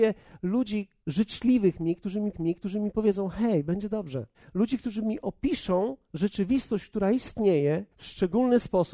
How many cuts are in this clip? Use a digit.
3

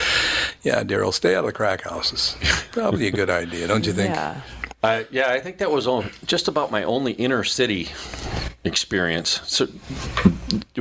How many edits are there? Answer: 0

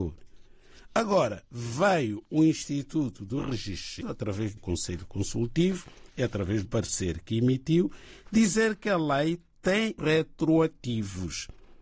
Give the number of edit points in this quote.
4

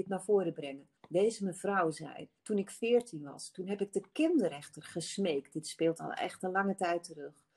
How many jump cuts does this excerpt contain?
2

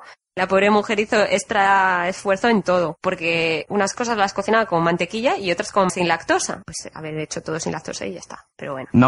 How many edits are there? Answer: 1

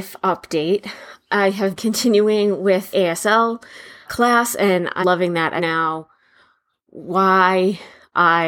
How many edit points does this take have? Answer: 5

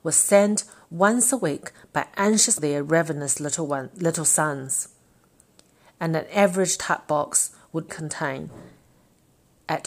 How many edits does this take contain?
2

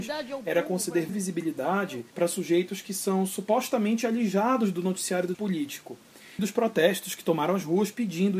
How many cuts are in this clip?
4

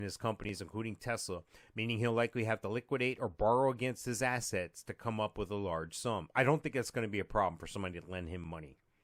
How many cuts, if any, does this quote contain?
0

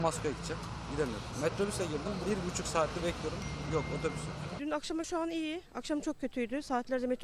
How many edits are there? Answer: 3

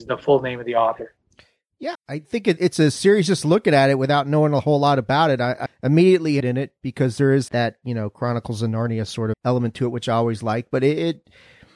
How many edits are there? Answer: 6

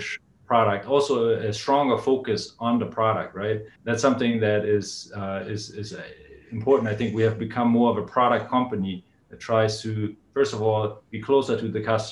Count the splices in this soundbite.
1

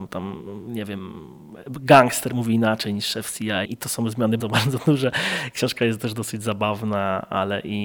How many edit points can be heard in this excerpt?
2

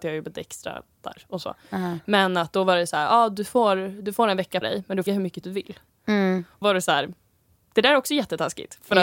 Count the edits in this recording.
4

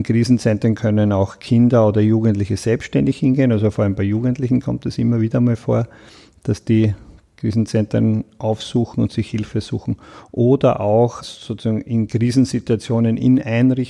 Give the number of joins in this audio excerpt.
1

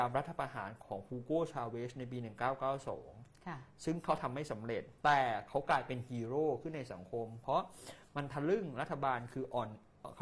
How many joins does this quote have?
1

